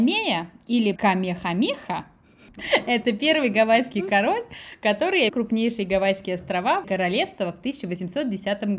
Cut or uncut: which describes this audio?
cut